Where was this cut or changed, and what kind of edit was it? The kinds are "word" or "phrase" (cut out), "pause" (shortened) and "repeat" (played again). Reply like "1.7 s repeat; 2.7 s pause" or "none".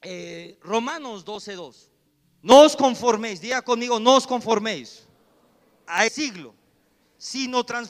6.1 s word